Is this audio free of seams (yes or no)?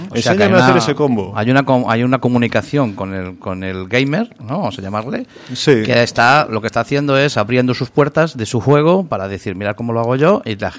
yes